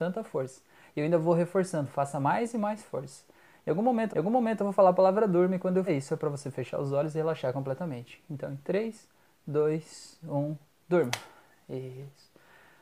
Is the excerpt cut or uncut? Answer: cut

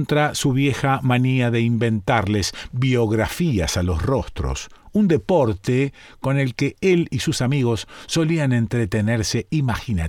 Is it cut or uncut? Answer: uncut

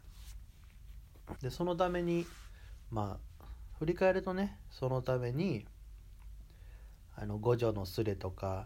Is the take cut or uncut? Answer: cut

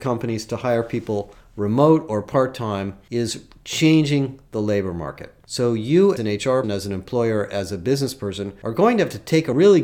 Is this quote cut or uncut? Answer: cut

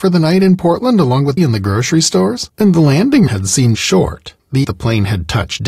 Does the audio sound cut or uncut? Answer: cut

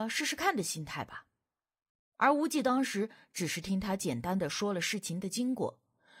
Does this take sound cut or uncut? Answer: uncut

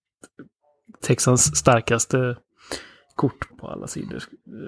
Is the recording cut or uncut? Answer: cut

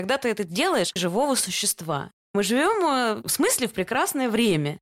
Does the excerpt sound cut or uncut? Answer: cut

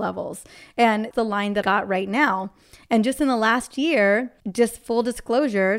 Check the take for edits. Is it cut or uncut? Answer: cut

